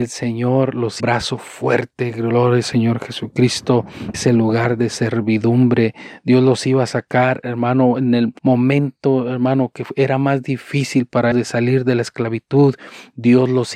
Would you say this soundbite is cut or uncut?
cut